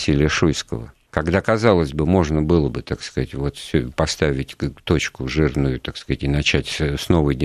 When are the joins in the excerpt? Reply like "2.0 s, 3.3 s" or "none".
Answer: 1.1 s